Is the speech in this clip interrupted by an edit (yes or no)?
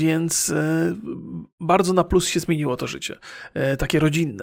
no